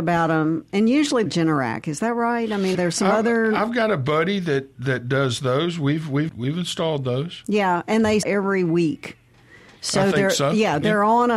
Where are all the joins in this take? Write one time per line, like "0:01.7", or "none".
0:01.3
0:02.7
0:04.7
0:06.3
0:08.2